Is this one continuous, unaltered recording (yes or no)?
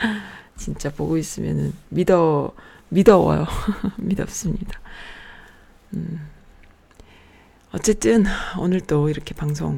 yes